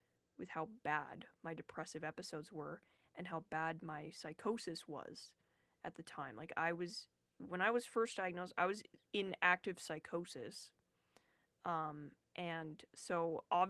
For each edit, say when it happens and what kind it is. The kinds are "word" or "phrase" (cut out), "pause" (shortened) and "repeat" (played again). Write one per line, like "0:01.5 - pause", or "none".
none